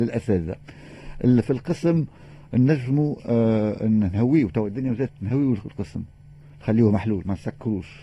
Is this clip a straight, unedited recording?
no; 1 cut; at 5.1 s

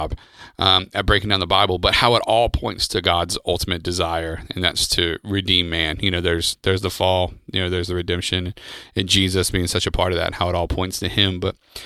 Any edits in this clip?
no; 0 cuts

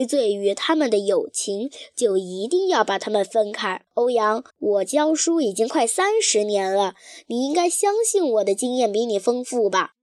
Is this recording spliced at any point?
yes; 2 cuts; at 3.9 s, 4.5 s

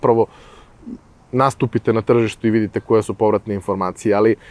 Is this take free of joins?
yes; 0 cuts

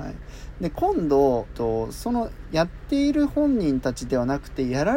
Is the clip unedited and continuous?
no; 1 cut; at 1.4 s

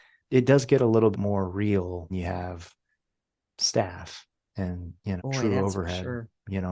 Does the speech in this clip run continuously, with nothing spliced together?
no; 3 cuts; at 1.1 s, 2.1 s, 5.2 s

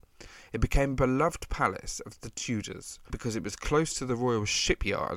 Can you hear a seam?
yes; 1 cut; at 3.1 s

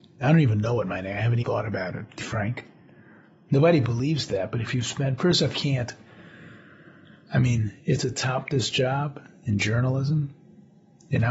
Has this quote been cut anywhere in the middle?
yes; 4 cuts; at 1.4 s, 2.2 s, 5.5 s, 8.0 s

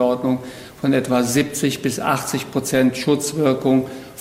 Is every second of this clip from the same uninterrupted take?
yes; 0 cuts

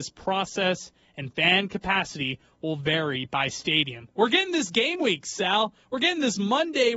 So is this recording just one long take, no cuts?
yes; 0 cuts

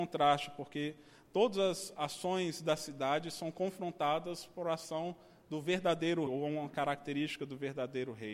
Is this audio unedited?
no; 1 cut; at 6.3 s

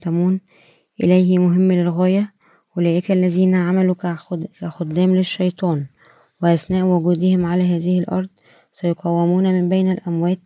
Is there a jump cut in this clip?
no; 0 cuts

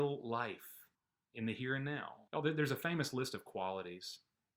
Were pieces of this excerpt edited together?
yes; 2 cuts; at 0.9 s, 2.3 s

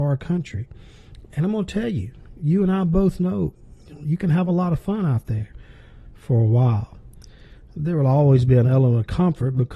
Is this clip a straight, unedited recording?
yes; 0 cuts

